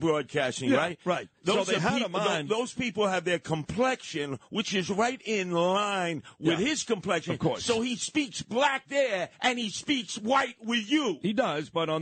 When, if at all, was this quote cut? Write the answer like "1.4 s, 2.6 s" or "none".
9.3 s